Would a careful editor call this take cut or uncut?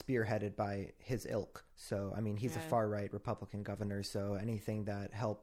uncut